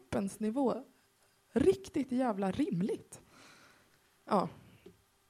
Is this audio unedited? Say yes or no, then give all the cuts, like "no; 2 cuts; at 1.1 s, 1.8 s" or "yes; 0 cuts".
yes; 0 cuts